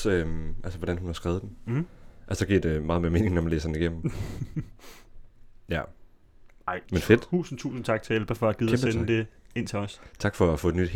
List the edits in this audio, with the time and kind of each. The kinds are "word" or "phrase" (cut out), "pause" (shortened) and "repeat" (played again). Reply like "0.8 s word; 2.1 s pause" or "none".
6.8 s word